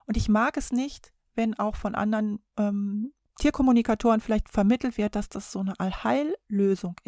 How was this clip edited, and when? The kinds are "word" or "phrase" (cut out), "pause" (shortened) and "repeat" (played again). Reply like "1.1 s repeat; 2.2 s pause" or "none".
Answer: 3.2 s pause